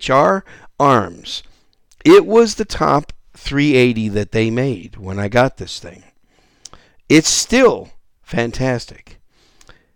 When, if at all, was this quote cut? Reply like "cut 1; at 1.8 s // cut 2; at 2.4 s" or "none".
none